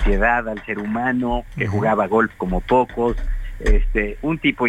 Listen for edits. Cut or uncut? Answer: uncut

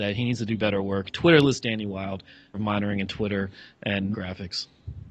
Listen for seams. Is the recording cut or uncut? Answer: cut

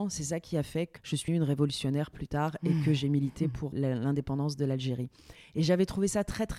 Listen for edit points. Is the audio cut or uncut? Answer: cut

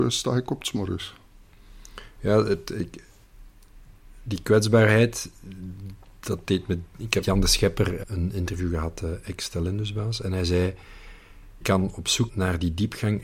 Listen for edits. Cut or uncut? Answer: cut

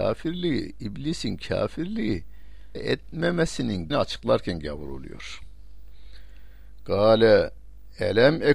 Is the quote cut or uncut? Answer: cut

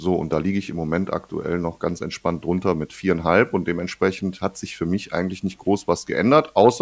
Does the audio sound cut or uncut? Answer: uncut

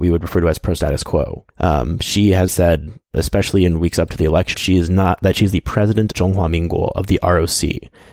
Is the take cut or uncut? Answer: cut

